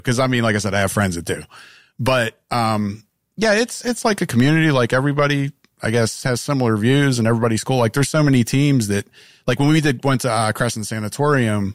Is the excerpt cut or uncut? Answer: uncut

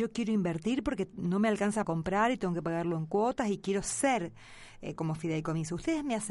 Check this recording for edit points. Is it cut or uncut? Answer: cut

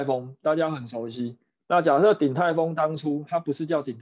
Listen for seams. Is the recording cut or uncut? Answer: uncut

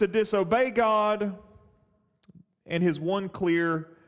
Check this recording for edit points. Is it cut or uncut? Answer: uncut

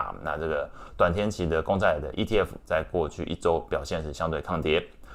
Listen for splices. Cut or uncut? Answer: uncut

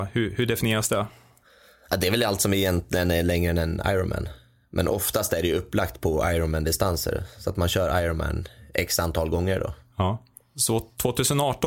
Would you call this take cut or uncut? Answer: uncut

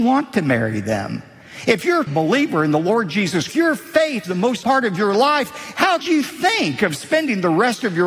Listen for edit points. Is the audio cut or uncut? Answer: cut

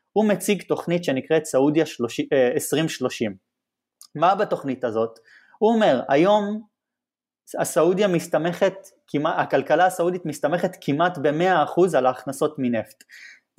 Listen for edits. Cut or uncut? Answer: uncut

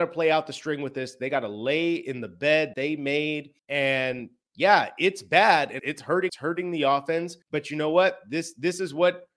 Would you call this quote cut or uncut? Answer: cut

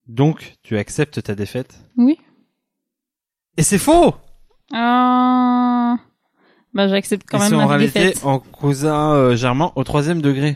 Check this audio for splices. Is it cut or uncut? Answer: uncut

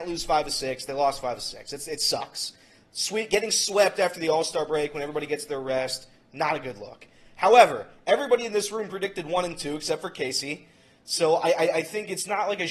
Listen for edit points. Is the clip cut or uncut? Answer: uncut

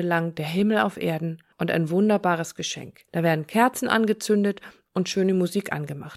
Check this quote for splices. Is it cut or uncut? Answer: cut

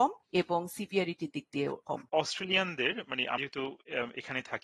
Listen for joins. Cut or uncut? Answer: cut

